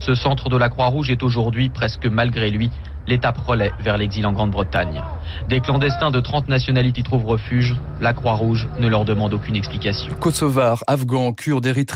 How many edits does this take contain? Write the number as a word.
one